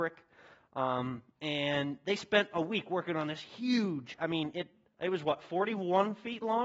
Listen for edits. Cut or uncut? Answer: uncut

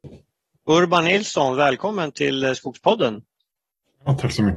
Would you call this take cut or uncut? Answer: uncut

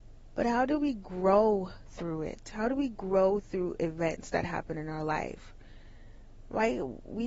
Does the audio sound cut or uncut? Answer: uncut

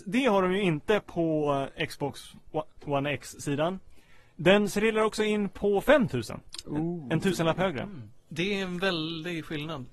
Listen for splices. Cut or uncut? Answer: uncut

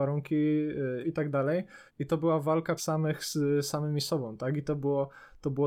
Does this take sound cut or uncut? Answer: cut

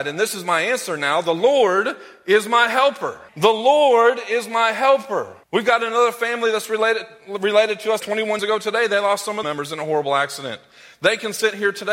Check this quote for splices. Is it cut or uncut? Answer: cut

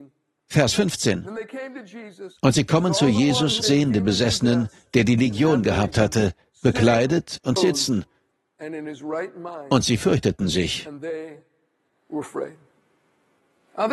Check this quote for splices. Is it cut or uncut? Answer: cut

